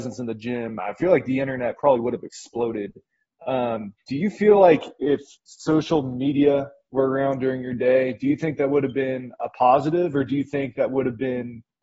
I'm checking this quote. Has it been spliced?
no; 0 cuts

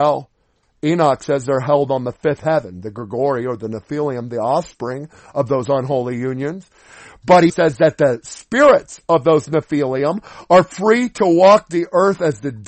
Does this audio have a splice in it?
yes; 1 cut; at 7.5 s

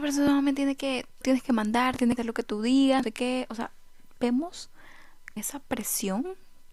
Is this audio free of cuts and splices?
no; 4 cuts; at 1.2 s, 2.2 s, 3.0 s, 5.4 s

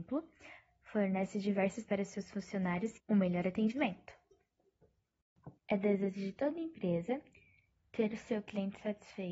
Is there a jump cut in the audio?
yes; 3 cuts; at 1.9 s, 3.0 s, 5.6 s

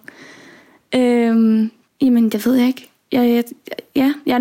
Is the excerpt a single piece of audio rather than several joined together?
no; 1 cut; at 1.9 s

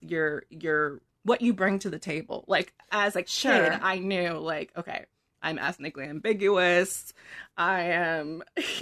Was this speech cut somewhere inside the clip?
no; 0 cuts

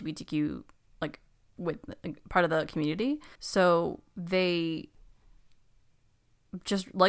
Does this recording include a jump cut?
yes; 1 cut; at 3.4 s

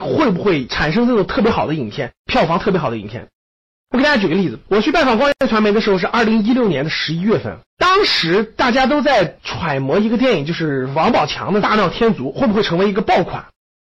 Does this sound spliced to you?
yes; 1 cut; at 7.7 s

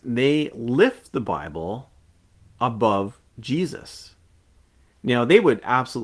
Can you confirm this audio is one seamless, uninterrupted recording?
yes; 0 cuts

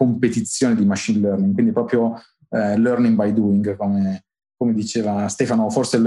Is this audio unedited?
yes; 0 cuts

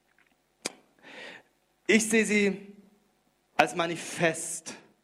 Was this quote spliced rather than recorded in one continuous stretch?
no; 0 cuts

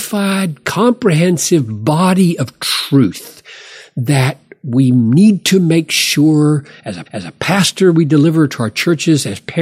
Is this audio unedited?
no; 1 cut; at 7.1 s

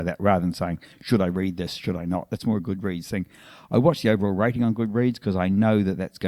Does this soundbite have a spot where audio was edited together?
no; 0 cuts

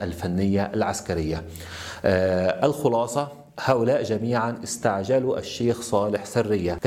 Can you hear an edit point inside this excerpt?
yes; 1 cut; at 3.5 s

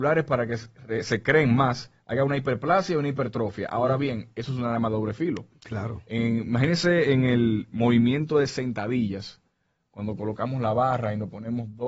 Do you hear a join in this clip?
no; 0 cuts

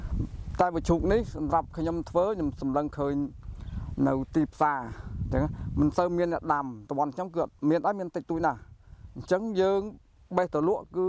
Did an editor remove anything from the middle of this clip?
yes; 1 cut; at 7.6 s

